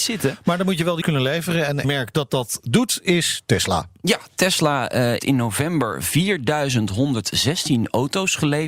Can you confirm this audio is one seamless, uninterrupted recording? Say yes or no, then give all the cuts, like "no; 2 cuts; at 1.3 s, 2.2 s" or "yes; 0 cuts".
no; 3 cuts; at 1.0 s, 1.8 s, 5.2 s